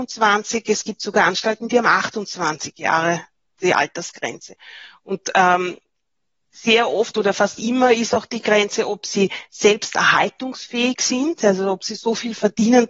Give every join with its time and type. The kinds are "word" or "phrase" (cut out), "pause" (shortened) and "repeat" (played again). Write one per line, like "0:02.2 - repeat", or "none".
none